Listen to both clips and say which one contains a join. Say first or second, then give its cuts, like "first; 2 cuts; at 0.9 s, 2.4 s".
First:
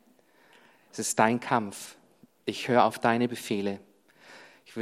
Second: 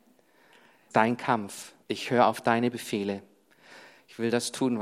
second; 2 cuts; at 0.9 s, 1.8 s